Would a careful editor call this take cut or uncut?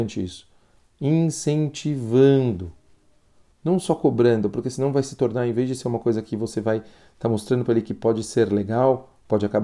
uncut